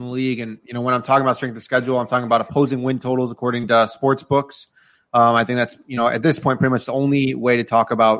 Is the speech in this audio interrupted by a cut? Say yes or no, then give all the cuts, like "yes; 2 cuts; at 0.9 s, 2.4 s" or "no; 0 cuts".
no; 0 cuts